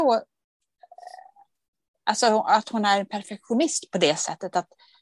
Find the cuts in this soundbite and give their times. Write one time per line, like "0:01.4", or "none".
none